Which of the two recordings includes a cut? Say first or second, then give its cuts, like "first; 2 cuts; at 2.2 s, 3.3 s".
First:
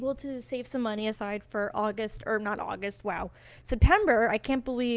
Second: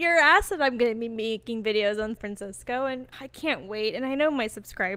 second; 2 cuts; at 2.2 s, 3.1 s